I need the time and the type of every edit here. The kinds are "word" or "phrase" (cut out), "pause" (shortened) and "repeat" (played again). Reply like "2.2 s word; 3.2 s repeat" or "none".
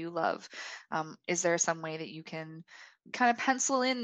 none